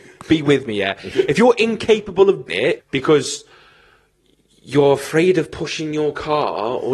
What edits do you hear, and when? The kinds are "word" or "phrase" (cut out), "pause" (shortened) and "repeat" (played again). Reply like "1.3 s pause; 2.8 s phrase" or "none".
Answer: 2.5 s word; 2.8 s word